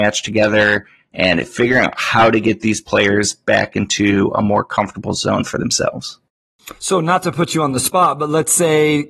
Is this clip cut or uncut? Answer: uncut